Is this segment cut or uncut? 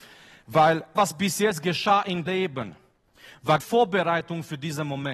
cut